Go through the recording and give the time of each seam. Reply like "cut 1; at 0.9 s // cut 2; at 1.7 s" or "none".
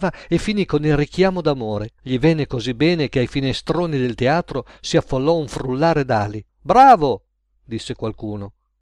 cut 1; at 2.0 s // cut 2; at 6.5 s